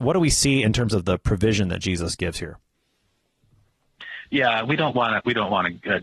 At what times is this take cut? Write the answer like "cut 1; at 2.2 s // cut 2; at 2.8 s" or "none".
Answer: none